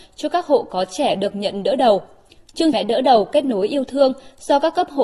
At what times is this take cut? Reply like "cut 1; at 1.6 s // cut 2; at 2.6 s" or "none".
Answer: cut 1; at 2.7 s